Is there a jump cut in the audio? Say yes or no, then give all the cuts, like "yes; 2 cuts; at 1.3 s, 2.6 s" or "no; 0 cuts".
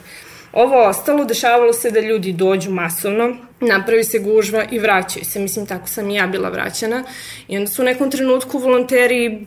yes; 1 cut; at 3.5 s